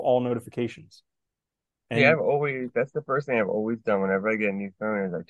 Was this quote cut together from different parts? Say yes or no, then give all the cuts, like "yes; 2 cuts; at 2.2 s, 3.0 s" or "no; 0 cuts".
no; 0 cuts